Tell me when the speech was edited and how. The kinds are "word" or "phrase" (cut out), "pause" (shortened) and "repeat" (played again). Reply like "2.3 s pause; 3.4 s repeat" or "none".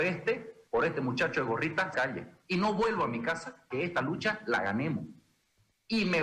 1.9 s phrase; 3.7 s word